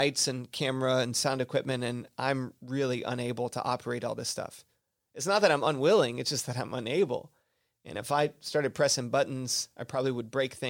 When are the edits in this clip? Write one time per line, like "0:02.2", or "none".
none